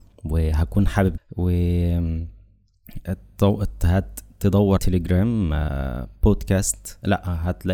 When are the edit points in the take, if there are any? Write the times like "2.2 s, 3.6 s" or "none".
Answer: 1.2 s, 3.1 s, 4.8 s